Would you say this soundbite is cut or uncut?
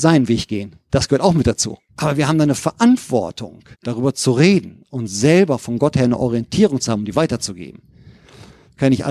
cut